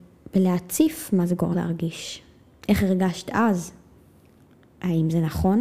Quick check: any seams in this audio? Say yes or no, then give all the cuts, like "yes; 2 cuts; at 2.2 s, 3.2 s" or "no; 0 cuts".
yes; 2 cuts; at 1.5 s, 4.0 s